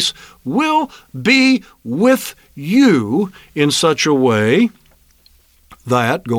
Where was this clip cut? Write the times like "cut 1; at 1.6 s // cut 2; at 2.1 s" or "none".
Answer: none